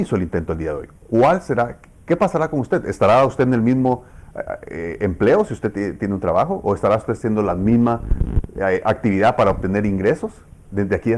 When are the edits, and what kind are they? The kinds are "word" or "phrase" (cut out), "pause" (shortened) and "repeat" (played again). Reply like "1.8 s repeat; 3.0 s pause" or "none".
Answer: none